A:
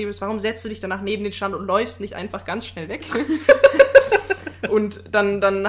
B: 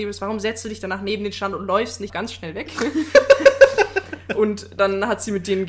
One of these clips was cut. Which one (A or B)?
B